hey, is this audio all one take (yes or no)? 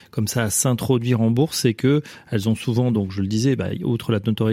yes